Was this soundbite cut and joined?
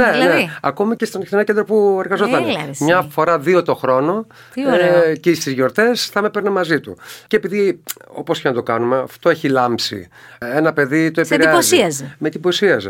no; 0 cuts

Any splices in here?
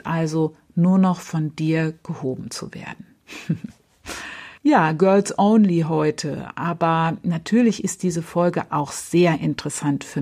yes; 1 cut; at 4.6 s

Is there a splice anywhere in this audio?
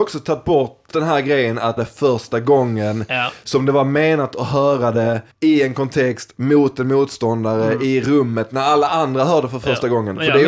yes; 3 cuts; at 0.9 s, 1.8 s, 5.3 s

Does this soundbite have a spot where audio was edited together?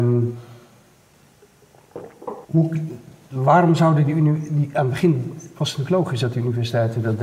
yes; 1 cut; at 2.4 s

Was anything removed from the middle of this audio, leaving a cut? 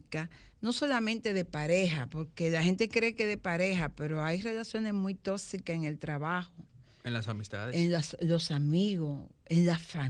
no; 0 cuts

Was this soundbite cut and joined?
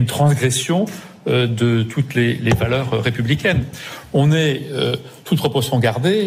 no; 0 cuts

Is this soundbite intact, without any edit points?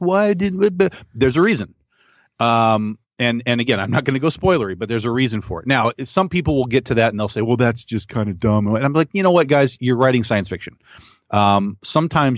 yes; 0 cuts

